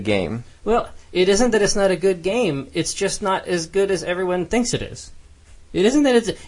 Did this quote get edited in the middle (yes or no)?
no